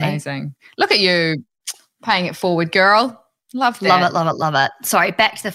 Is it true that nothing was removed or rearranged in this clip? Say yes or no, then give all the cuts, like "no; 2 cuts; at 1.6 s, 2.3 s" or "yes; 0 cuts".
yes; 0 cuts